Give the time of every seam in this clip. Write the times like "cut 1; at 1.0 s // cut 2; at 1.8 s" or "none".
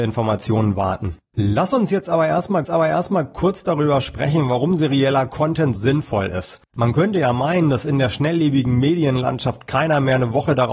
cut 1; at 1.2 s // cut 2; at 2.6 s // cut 3; at 5.8 s // cut 4; at 6.7 s